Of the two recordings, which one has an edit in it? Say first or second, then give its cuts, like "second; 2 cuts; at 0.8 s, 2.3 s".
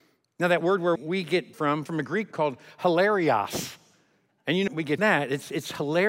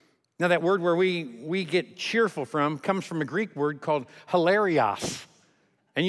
first; 6 cuts; at 1.0 s, 1.5 s, 1.9 s, 2.3 s, 4.7 s, 5.0 s